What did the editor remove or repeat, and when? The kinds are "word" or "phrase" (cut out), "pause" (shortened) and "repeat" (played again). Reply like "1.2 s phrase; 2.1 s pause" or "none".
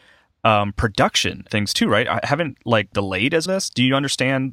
1.5 s word; 2.9 s phrase; 3.5 s phrase